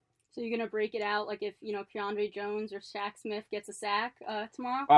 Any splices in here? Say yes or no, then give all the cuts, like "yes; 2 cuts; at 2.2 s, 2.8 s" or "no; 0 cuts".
no; 0 cuts